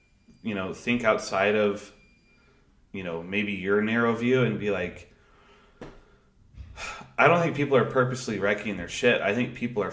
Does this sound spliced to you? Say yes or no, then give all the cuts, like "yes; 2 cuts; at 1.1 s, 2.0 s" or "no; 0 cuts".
no; 0 cuts